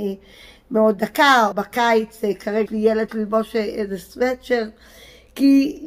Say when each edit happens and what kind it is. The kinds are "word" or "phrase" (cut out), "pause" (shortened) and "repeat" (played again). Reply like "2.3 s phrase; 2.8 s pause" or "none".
1.5 s word; 2.7 s word; 3.1 s word